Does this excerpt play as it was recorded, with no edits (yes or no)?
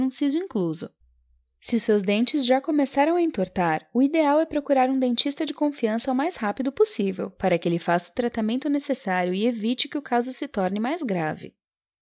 yes